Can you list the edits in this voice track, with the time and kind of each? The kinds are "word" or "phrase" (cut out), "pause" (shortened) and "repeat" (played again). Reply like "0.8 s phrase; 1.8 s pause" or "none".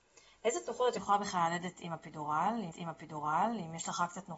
2.7 s repeat